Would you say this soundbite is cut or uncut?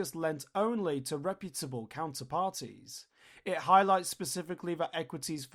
uncut